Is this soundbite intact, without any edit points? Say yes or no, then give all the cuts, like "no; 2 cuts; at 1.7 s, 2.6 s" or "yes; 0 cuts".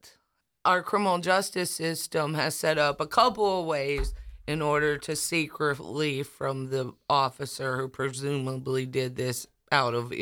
yes; 0 cuts